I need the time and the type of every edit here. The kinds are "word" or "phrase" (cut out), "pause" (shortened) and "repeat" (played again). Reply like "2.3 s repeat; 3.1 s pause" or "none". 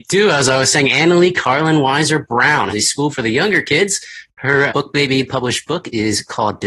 2.7 s word; 3.1 s word; 4.7 s word